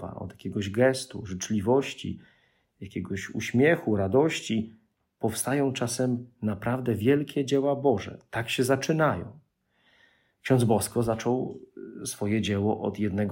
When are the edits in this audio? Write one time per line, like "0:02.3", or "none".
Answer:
none